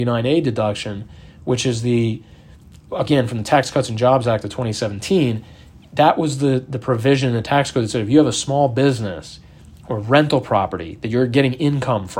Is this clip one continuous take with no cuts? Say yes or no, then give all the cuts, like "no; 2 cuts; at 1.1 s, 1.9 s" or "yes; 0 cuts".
yes; 0 cuts